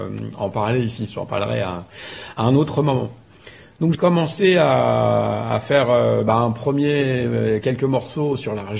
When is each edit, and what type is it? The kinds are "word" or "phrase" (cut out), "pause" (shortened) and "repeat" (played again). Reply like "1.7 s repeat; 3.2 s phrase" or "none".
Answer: 3.9 s word

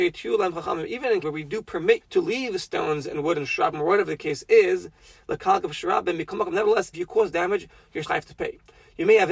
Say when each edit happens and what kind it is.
1.2 s word; 2.0 s word; 6.9 s word; 8.0 s word

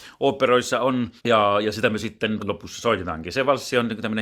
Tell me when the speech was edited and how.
1.2 s pause; 2.4 s word

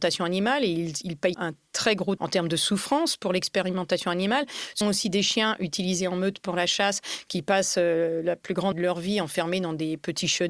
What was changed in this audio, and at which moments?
1.3 s word; 2.2 s word; 4.8 s word; 8.7 s word

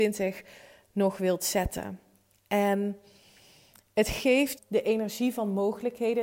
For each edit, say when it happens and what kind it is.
4.5 s word

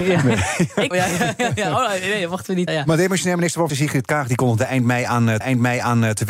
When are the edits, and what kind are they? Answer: 0.9 s phrase; 2.7 s word; 3.7 s word; 5.4 s repeat

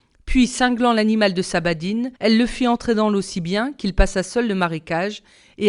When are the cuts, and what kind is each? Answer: 2.2 s pause

